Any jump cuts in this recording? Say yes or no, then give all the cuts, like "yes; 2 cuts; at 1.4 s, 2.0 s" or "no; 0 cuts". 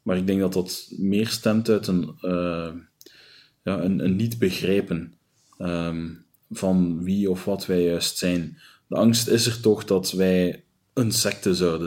no; 0 cuts